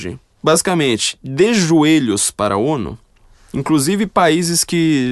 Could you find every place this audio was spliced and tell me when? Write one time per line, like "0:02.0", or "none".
none